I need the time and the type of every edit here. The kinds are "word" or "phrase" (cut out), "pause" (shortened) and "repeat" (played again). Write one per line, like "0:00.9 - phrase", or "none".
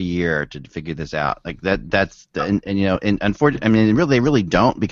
none